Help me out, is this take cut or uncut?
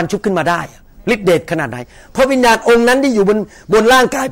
uncut